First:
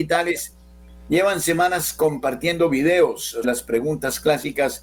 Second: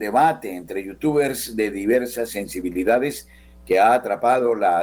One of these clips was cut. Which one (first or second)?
first